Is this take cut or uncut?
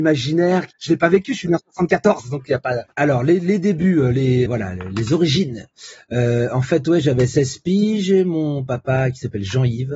cut